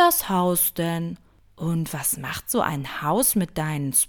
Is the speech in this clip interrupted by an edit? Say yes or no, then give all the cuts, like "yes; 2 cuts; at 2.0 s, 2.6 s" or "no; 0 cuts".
no; 0 cuts